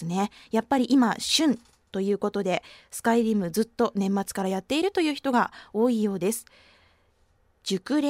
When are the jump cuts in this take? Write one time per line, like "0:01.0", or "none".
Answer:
none